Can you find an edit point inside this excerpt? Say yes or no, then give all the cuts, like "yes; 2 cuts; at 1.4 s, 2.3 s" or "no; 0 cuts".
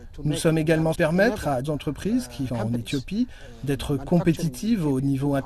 yes; 3 cuts; at 0.9 s, 1.6 s, 2.5 s